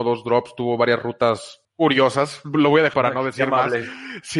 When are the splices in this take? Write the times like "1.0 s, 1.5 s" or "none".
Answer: 1.6 s, 2.9 s